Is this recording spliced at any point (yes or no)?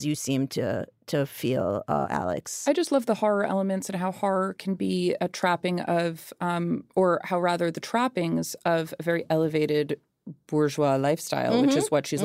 no